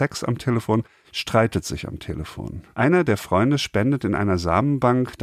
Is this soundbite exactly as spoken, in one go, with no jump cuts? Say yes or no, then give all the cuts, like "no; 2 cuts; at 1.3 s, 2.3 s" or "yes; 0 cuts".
no; 1 cut; at 2.7 s